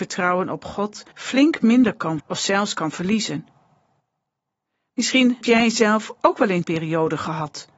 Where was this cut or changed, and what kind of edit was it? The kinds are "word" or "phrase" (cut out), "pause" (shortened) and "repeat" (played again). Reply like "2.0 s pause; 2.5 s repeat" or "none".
1.1 s pause; 2.2 s word; 5.4 s word; 6.6 s word